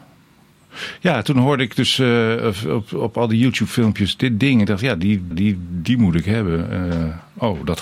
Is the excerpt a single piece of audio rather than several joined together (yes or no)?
no